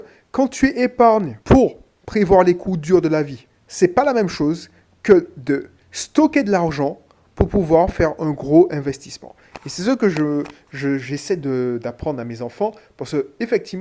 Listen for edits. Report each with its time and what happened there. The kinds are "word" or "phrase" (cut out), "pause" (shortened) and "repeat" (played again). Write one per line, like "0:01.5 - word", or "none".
0:01.4 - pause